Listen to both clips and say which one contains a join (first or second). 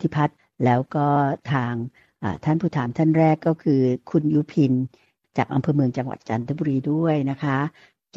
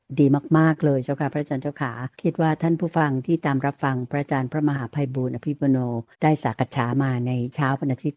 second